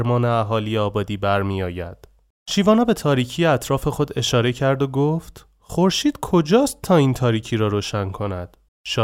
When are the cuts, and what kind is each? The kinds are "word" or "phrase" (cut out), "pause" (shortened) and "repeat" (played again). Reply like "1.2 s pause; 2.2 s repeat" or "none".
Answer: none